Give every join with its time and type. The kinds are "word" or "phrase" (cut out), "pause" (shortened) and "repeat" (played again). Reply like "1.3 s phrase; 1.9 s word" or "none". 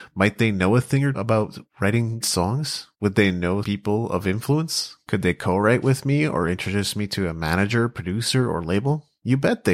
1.1 s word; 2.2 s word; 2.9 s pause; 3.6 s word